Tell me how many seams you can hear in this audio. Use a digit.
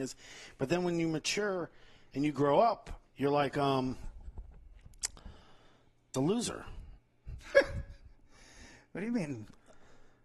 3